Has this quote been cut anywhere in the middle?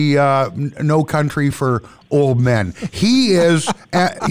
no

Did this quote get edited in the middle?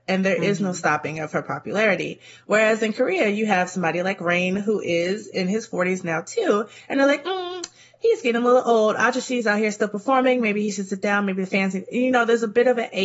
no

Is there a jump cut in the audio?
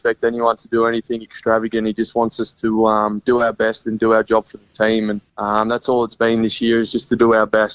yes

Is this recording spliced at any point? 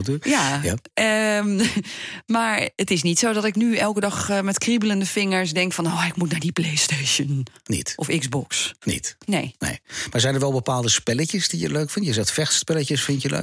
no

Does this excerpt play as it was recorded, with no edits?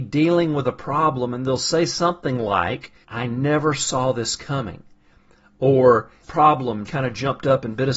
no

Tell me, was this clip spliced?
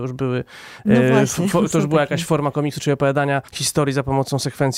yes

